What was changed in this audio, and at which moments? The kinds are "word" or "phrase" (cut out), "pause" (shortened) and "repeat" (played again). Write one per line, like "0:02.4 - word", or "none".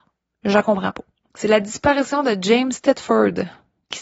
none

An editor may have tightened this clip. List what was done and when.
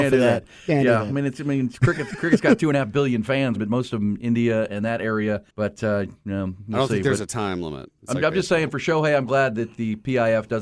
0:03.6 - word
0:05.5 - pause

